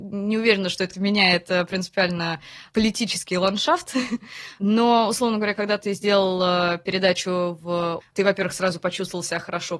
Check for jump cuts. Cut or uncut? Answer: cut